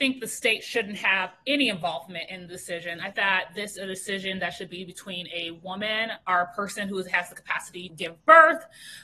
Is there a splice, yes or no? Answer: yes